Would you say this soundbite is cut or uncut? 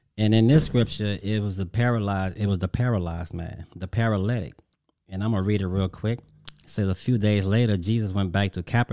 uncut